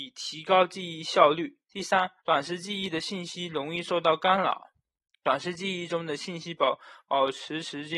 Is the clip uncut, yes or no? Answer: no